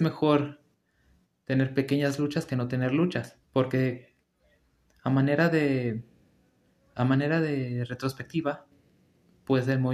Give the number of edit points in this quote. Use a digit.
1